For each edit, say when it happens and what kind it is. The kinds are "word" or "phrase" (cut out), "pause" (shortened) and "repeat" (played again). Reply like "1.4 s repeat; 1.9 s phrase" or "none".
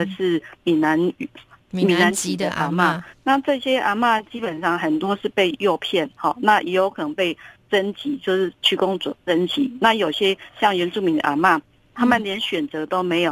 none

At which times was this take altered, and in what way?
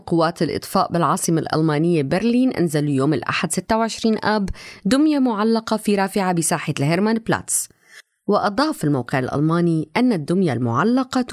none

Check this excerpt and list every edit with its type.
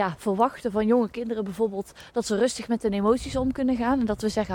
none

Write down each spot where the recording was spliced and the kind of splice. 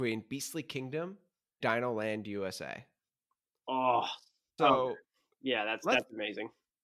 1.6 s word; 4.6 s word

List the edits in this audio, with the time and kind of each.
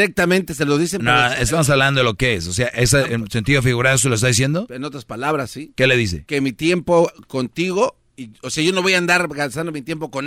3.1 s word

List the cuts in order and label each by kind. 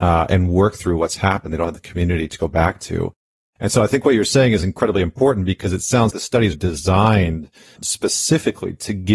6.1 s word; 6.5 s word; 7.8 s word

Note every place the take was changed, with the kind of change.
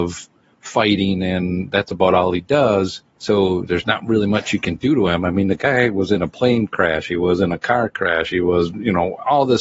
3.1 s pause

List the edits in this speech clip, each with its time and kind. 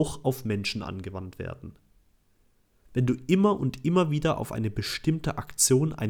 none

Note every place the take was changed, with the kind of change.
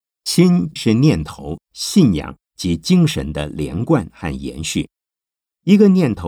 1.6 s phrase

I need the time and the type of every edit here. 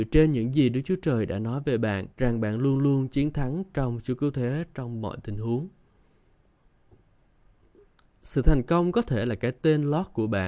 2.1 s pause

